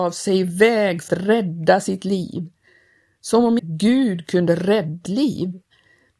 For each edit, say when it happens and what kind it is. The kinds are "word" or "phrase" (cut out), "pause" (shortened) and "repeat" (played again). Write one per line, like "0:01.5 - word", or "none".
0:01.1 - word
0:03.6 - word
0:05.1 - word

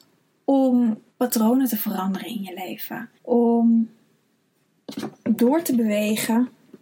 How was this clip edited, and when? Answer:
0:01.1 - pause
0:03.2 - pause

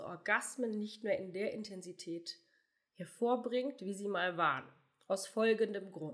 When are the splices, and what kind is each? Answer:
none

